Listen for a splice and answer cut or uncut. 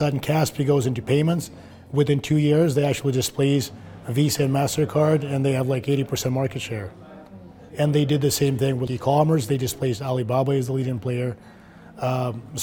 cut